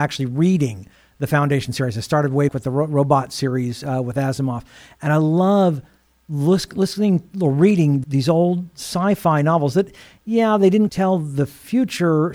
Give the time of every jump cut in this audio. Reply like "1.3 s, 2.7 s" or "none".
2.5 s, 8.0 s, 10.9 s